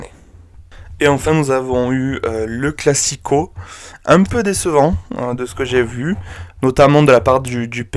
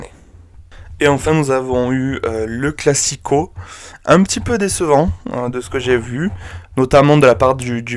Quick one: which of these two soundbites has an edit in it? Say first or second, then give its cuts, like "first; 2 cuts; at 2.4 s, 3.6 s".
first; 1 cut; at 4.3 s